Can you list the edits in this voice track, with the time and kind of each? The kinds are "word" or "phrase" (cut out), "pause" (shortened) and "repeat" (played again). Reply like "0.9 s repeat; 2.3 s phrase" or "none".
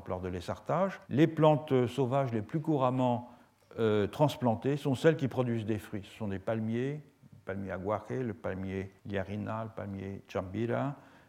1.0 s pause; 9.0 s pause